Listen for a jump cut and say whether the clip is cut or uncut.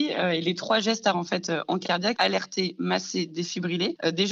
cut